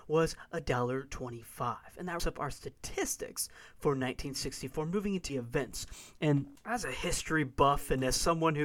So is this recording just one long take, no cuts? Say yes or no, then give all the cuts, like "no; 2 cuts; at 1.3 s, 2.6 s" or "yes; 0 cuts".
no; 2 cuts; at 2.2 s, 5.3 s